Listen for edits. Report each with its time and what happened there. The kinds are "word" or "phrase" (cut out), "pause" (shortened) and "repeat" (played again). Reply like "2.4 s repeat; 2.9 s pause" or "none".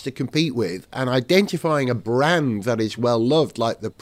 none